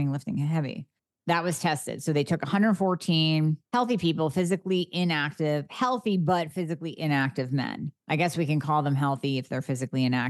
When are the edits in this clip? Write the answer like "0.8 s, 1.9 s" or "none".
3.7 s, 8.0 s

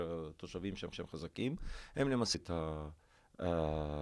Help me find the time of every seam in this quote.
0.9 s, 2.3 s

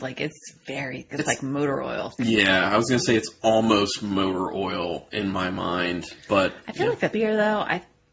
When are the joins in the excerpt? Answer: 1.1 s, 2.1 s, 7.1 s

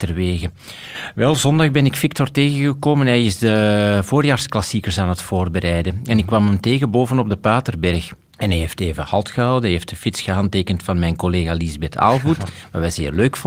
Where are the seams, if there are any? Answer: none

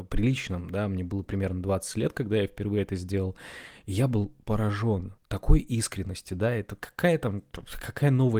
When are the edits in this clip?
5.2 s

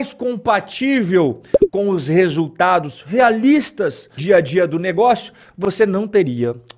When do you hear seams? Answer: 4.2 s

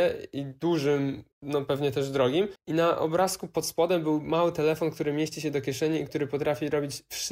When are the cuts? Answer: 1.3 s, 2.6 s

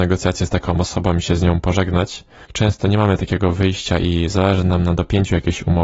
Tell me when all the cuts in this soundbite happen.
2.4 s

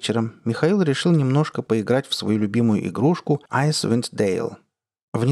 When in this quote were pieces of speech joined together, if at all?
3.5 s

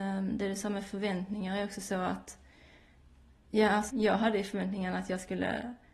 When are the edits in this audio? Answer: 3.9 s

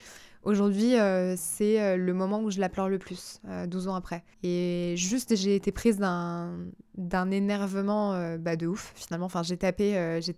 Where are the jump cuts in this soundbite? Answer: 4.3 s

